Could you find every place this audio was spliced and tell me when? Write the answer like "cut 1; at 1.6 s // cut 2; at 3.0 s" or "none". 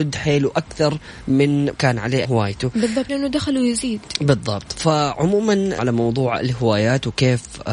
cut 1; at 1.7 s // cut 2; at 2.2 s // cut 3; at 3.1 s // cut 4; at 5.8 s